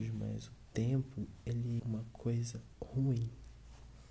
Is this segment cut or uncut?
cut